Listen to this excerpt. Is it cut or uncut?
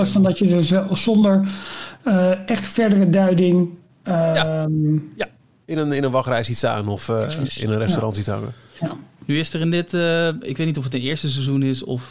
uncut